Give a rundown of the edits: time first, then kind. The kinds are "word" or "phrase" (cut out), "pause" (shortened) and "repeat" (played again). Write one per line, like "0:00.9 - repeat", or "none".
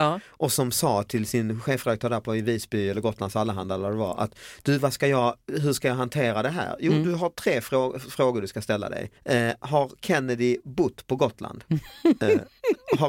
0:09.2 - pause